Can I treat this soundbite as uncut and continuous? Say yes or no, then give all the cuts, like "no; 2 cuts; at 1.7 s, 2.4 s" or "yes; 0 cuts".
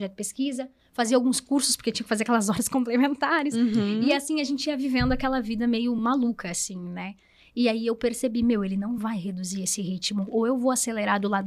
yes; 0 cuts